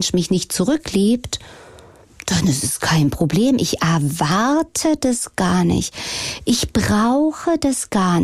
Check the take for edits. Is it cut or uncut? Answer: uncut